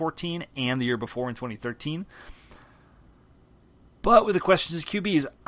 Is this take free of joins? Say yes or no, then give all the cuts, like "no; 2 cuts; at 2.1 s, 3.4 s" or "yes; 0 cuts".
yes; 0 cuts